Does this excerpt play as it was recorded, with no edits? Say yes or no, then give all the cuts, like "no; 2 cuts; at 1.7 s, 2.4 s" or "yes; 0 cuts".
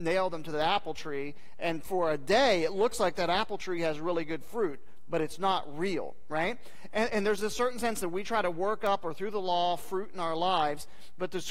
yes; 0 cuts